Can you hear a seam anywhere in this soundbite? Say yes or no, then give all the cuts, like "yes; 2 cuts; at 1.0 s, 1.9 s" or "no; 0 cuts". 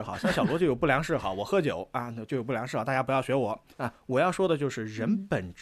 yes; 1 cut; at 3.7 s